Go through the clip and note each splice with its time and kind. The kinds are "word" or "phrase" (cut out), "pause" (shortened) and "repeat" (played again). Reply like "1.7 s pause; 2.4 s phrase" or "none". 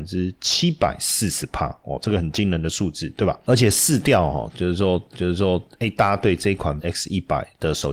5.1 s repeat; 6.8 s word